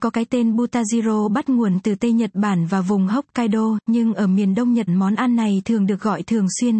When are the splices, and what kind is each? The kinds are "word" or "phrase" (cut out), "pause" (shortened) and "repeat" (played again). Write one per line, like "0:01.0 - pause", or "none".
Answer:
0:04.9 - word